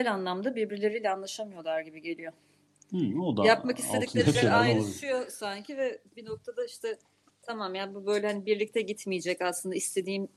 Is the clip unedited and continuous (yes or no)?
no